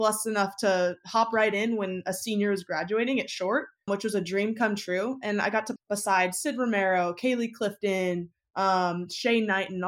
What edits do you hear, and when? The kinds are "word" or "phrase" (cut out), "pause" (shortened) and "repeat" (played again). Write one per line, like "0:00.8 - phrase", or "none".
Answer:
0:03.9 - word
0:05.8 - word